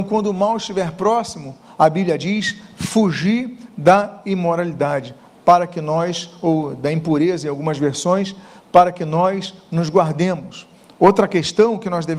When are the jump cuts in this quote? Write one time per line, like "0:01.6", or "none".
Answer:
none